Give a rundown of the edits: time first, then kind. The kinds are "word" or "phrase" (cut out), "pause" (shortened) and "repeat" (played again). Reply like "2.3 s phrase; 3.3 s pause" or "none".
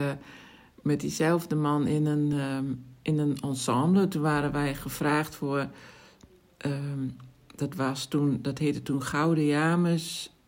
none